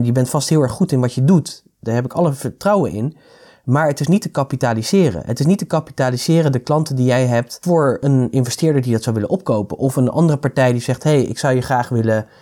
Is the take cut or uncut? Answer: uncut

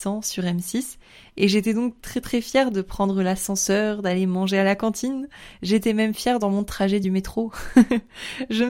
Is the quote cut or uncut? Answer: uncut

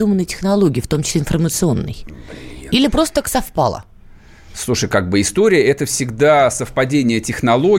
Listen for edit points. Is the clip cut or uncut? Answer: uncut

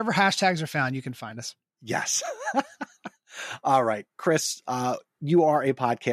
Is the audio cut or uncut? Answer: uncut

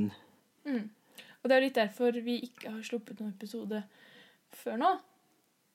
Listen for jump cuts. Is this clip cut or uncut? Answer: uncut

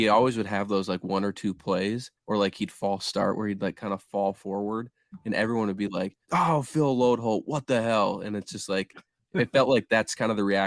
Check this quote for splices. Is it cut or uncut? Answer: cut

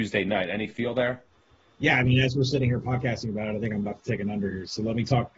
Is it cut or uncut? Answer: uncut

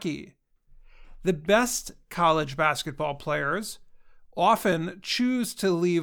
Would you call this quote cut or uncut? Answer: uncut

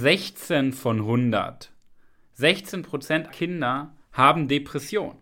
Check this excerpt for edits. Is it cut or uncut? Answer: cut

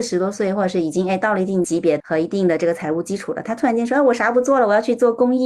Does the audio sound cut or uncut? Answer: uncut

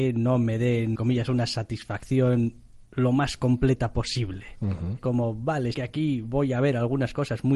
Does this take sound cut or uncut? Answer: cut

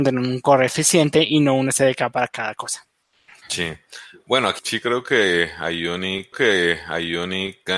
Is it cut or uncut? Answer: cut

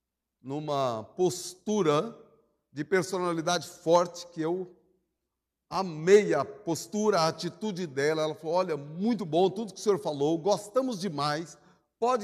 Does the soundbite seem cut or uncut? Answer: uncut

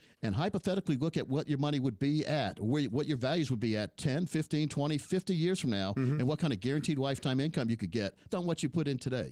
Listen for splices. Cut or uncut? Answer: cut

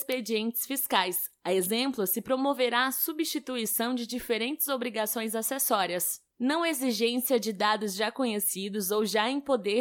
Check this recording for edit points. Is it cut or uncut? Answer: uncut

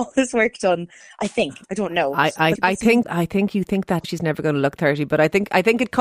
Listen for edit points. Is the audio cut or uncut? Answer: cut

